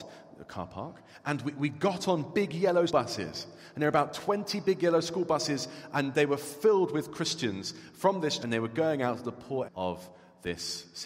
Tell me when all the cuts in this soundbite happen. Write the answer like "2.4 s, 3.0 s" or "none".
2.9 s, 8.4 s, 9.6 s